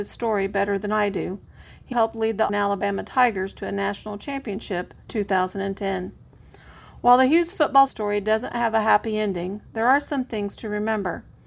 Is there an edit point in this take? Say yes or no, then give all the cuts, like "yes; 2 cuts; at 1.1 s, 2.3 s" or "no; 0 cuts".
yes; 4 cuts; at 1.9 s, 2.5 s, 5.1 s, 7.9 s